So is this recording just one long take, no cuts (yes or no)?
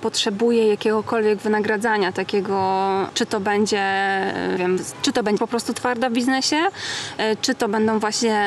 no